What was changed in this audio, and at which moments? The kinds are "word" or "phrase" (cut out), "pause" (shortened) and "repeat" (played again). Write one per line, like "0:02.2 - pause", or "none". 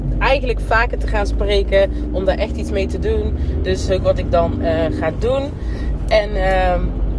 0:03.9 - phrase